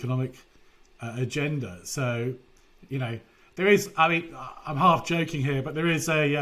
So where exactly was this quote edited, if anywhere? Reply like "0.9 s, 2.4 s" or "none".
none